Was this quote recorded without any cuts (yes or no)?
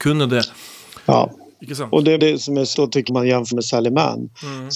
no